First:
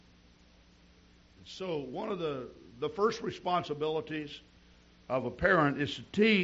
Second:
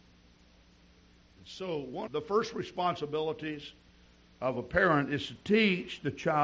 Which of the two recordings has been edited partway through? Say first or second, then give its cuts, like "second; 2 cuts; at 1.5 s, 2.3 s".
second; 1 cut; at 2.1 s